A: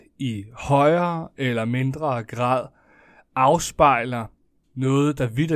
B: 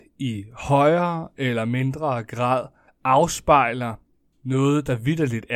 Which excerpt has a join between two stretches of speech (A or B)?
B